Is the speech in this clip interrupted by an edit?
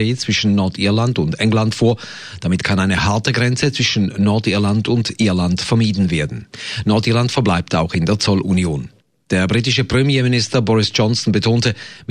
no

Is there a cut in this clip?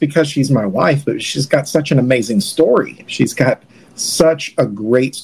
no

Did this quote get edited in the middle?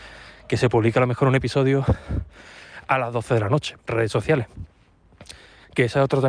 yes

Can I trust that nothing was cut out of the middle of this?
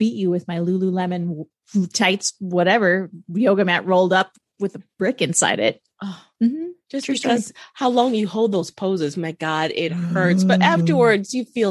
yes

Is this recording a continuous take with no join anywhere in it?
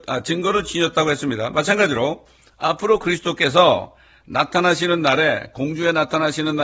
yes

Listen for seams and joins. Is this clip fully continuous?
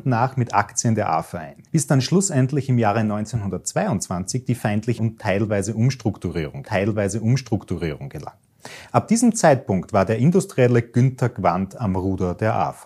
no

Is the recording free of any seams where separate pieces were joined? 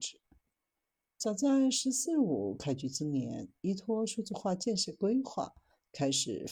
yes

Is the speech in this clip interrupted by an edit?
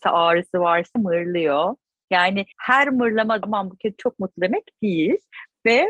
yes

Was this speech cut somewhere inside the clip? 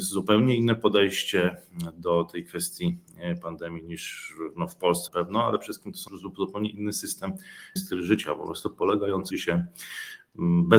yes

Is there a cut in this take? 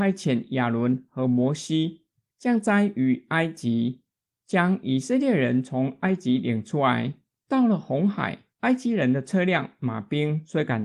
no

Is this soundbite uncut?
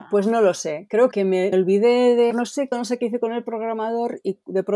no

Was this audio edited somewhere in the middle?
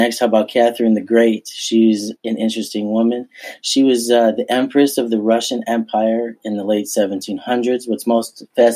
yes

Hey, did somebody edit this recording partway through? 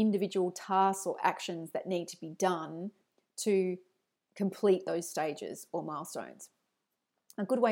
no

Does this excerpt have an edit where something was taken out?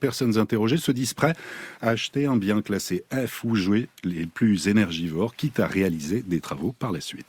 no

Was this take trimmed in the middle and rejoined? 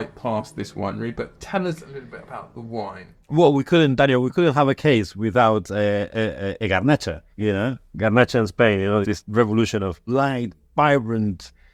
yes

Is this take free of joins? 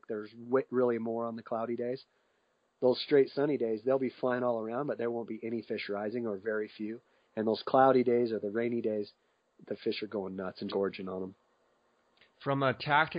no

